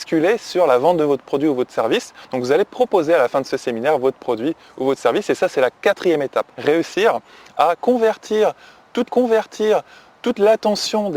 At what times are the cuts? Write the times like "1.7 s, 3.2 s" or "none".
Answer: 6.5 s, 9.1 s